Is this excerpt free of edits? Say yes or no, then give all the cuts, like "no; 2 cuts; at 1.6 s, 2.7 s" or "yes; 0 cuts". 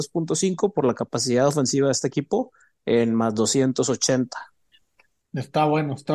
yes; 0 cuts